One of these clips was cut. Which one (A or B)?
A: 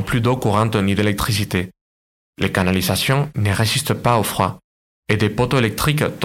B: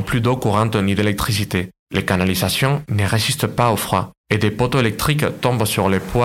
B